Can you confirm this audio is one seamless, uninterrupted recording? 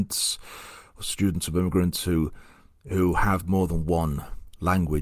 yes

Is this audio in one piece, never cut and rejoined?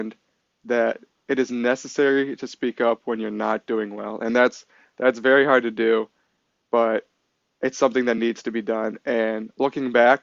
yes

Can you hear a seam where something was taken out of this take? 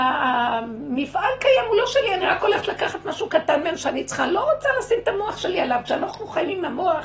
no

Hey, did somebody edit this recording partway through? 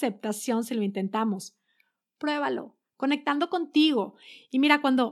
no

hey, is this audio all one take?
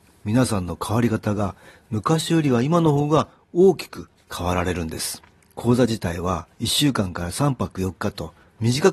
yes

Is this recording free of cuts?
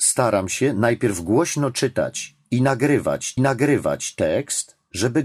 no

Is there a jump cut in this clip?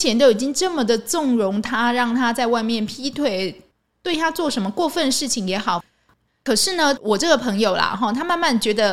no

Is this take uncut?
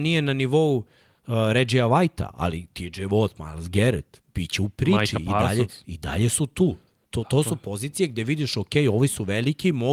yes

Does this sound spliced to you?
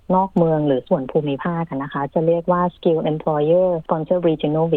no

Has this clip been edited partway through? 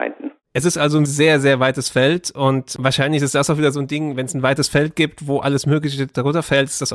yes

